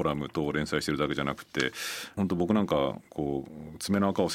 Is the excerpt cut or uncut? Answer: cut